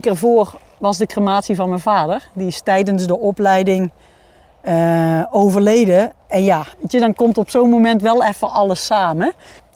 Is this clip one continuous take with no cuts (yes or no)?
no